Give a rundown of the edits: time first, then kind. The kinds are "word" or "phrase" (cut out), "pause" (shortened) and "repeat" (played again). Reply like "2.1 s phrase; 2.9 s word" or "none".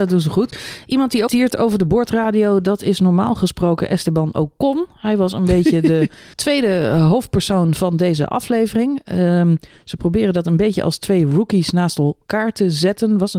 1.3 s phrase; 6.3 s pause